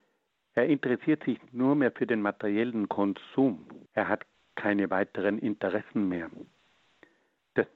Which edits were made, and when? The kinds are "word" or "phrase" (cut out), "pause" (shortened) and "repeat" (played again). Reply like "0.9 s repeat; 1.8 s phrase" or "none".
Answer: 3.9 s pause

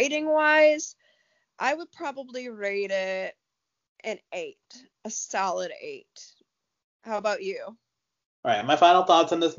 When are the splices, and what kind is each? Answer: none

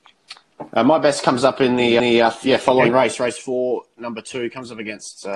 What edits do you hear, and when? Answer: 2.0 s repeat

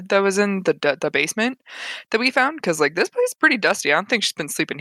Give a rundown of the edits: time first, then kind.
none

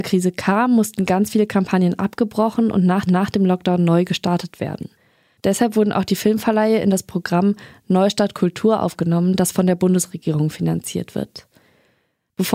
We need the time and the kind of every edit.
3.1 s repeat

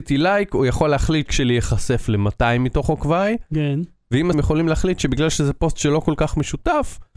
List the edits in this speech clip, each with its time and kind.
1.3 s word; 4.3 s phrase

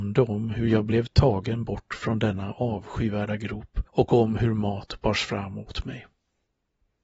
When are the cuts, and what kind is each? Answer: 3.9 s pause

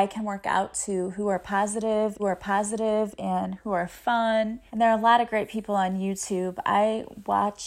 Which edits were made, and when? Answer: 2.2 s repeat; 4.7 s pause

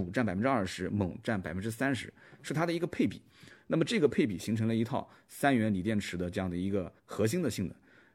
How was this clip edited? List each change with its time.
7.0 s pause

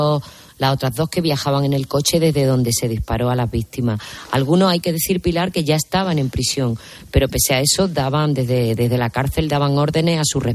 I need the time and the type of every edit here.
none

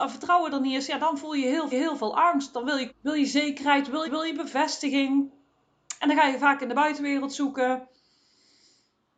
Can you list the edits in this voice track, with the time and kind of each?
1.7 s repeat; 2.9 s phrase; 4.0 s repeat

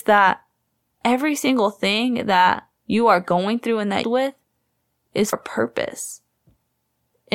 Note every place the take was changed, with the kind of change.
2.8 s pause; 4.0 s phrase; 5.3 s word

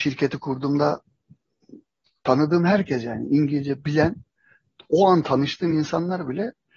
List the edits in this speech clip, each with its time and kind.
none

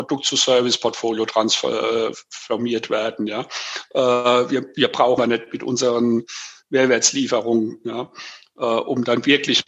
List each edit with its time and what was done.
5.2 s phrase

